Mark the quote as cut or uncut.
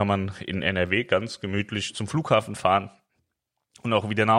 uncut